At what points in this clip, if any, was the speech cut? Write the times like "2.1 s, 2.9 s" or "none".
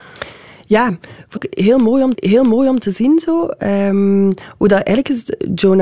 1.4 s, 2.1 s